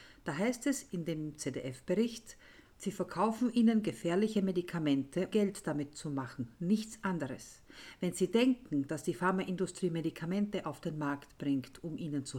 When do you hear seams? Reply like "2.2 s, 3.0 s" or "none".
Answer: 2.7 s, 5.3 s